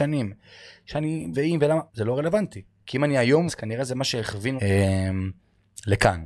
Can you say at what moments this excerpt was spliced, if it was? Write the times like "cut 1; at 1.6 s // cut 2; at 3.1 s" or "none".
cut 1; at 1.3 s // cut 2; at 1.9 s // cut 3; at 3.5 s // cut 4; at 4.6 s